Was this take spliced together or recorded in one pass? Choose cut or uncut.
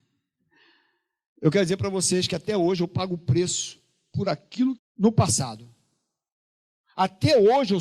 cut